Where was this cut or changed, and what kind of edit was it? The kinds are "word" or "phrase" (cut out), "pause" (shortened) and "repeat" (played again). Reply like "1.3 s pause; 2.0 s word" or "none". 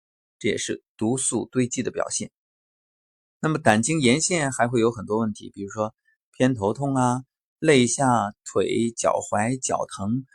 none